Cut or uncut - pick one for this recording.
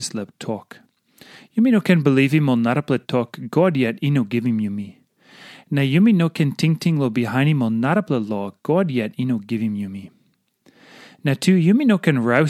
uncut